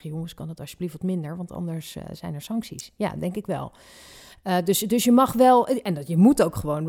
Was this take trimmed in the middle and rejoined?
no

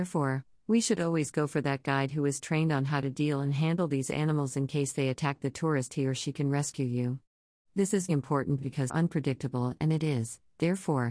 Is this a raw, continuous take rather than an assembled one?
no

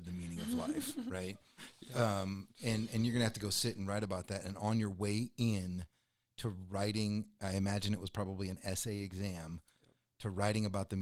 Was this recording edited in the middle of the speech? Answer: no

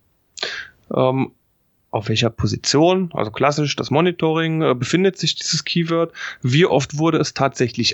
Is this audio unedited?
yes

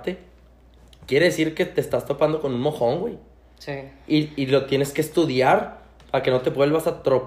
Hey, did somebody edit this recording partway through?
no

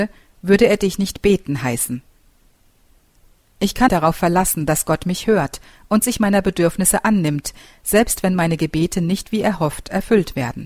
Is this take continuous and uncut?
no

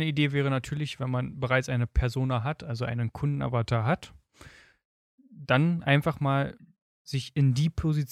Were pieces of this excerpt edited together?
no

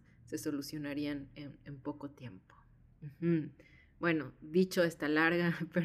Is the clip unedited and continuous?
yes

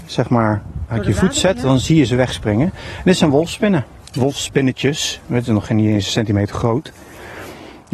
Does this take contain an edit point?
no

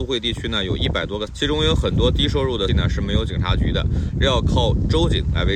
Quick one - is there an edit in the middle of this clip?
yes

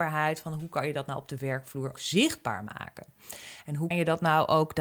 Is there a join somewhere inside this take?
yes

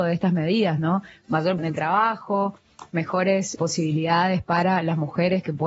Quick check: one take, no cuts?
no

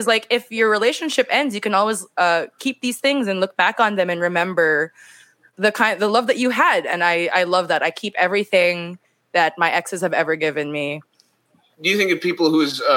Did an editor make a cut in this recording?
no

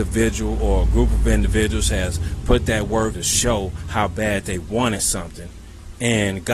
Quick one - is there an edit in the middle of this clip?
yes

